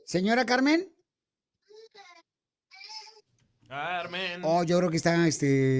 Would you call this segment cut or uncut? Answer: uncut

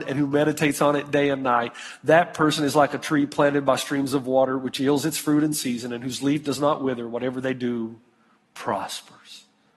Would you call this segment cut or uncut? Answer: uncut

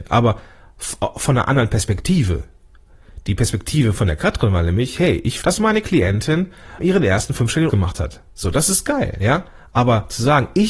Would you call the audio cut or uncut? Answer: cut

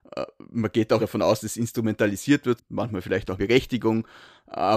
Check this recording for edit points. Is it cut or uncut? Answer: cut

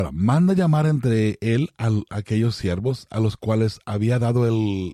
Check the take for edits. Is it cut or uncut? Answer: uncut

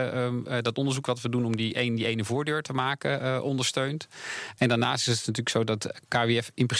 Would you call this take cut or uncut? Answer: uncut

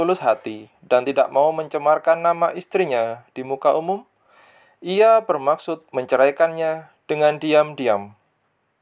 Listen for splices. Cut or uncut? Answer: uncut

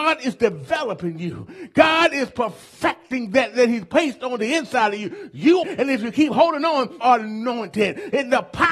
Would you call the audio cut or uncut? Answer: cut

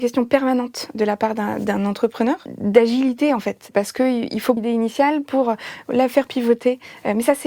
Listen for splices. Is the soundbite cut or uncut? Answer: cut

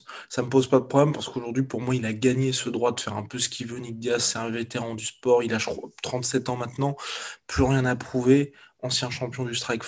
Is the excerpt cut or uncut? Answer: uncut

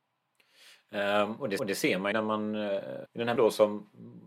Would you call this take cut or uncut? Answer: cut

